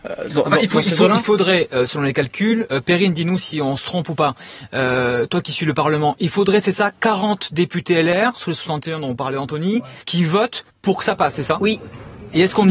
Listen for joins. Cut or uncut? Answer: cut